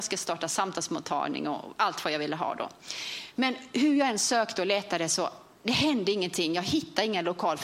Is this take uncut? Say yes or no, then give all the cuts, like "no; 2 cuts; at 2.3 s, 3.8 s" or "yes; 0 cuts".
yes; 0 cuts